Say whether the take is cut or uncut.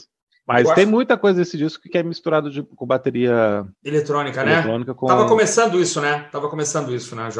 cut